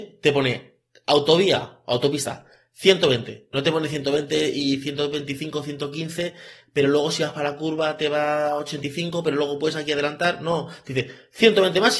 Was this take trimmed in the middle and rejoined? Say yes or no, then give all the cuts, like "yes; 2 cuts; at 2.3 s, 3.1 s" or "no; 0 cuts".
no; 0 cuts